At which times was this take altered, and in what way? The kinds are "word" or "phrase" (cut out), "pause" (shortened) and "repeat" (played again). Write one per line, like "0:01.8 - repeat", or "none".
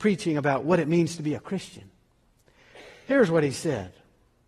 none